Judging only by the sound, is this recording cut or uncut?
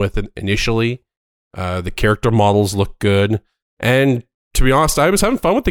uncut